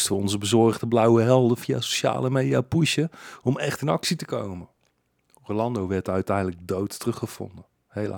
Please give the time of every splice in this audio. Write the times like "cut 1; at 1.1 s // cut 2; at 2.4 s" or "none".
none